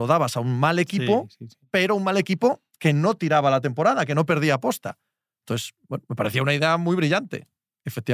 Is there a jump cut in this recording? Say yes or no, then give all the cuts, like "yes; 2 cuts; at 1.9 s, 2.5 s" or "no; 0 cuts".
no; 0 cuts